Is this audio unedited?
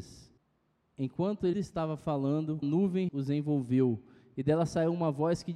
no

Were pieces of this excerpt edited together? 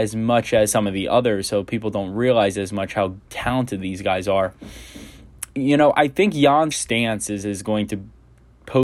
yes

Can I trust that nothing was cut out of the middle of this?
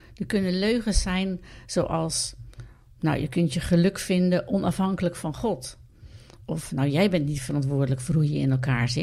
yes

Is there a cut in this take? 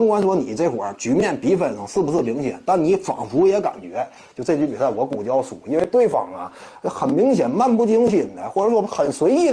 no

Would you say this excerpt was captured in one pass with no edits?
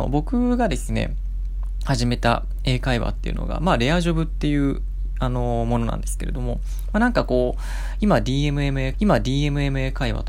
no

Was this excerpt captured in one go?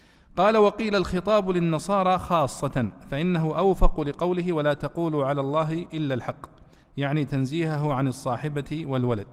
yes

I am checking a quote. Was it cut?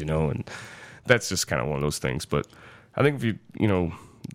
no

